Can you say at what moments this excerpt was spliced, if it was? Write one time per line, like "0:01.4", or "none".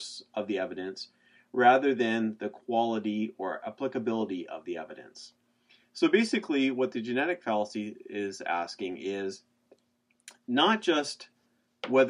none